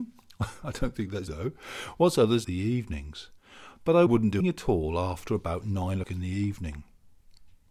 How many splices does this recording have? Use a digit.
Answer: 5